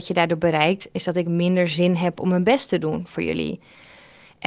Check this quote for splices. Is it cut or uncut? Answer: uncut